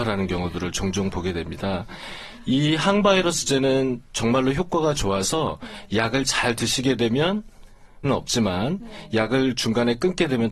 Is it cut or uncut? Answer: cut